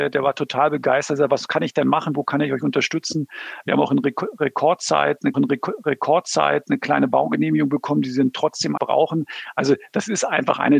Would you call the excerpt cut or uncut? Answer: cut